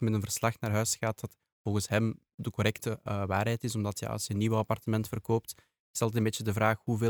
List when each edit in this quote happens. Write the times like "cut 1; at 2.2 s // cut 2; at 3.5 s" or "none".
none